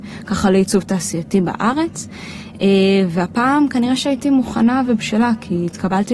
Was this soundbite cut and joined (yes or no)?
no